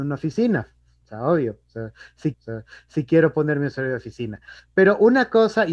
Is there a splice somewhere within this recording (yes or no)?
yes